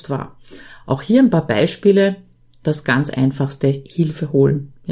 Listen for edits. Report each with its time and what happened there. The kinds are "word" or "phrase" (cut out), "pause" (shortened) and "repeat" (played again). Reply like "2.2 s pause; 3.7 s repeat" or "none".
none